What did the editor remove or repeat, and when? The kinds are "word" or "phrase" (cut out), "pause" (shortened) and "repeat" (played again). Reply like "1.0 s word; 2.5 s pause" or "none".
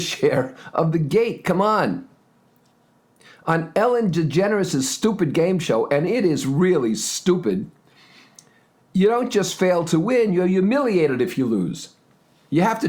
none